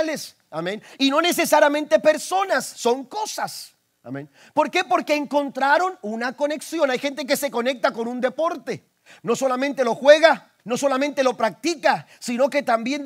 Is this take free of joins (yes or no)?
no